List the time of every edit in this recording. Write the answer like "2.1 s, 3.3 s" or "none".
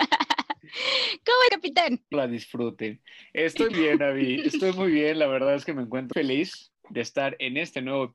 1.5 s, 2.1 s, 3.7 s, 6.1 s